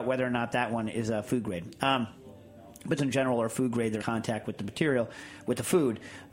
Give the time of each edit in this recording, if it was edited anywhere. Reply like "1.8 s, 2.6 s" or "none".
3.0 s, 4.0 s